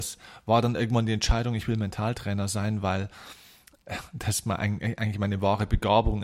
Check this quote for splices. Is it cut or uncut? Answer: uncut